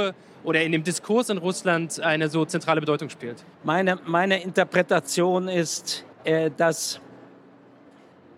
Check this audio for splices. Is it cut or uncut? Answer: cut